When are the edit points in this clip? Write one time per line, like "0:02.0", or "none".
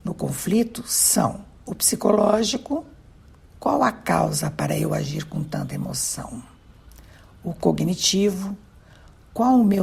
none